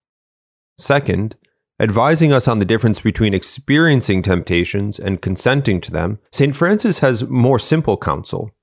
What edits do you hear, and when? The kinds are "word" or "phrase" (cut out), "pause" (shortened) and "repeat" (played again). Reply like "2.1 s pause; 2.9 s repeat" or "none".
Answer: 6.3 s pause